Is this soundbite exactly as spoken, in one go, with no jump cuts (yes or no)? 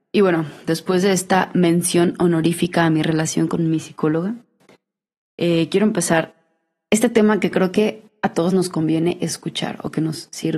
yes